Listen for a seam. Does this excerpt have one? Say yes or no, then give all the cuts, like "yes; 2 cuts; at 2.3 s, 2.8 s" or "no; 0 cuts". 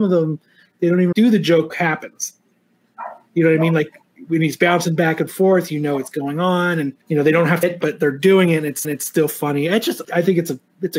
yes; 6 cuts; at 1.1 s, 1.7 s, 7.0 s, 7.6 s, 8.8 s, 10.0 s